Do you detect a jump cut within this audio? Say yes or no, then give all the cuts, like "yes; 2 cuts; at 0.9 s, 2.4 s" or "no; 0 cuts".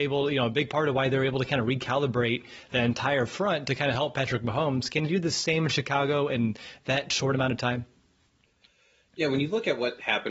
no; 0 cuts